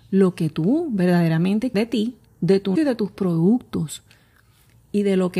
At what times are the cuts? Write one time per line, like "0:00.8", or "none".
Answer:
0:01.7
0:02.8